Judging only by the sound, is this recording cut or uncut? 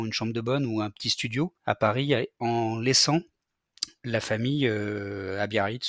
cut